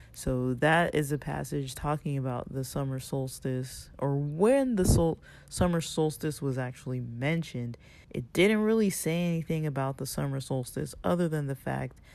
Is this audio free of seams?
no; 1 cut; at 8.0 s

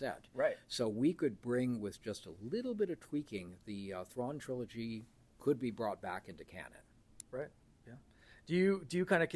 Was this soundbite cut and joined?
no; 0 cuts

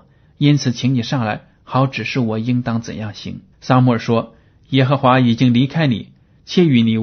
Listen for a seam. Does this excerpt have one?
yes; 1 cut; at 3.5 s

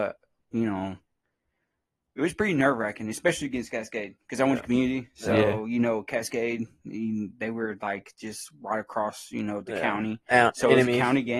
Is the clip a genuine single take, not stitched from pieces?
yes; 0 cuts

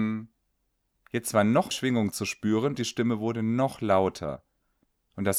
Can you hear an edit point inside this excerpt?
yes; 2 cuts; at 1.7 s, 2.8 s

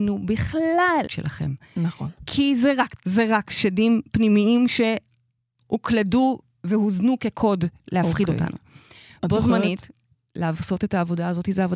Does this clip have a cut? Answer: yes; 2 cuts; at 1.1 s, 2.9 s

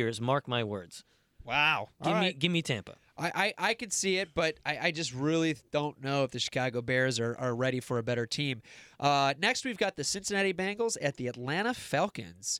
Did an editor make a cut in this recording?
no; 0 cuts

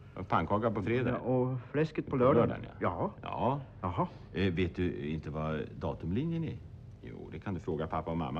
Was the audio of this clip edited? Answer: no; 0 cuts

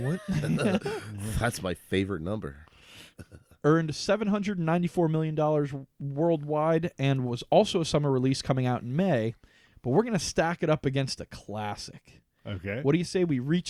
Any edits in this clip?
no; 0 cuts

